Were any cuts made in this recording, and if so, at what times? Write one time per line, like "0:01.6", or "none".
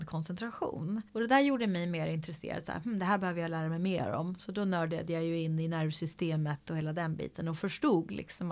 0:01.1